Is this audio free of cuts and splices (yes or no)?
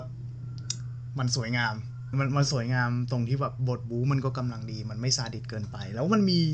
no